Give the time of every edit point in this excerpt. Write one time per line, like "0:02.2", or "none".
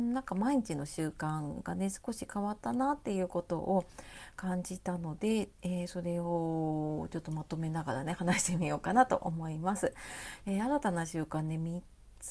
none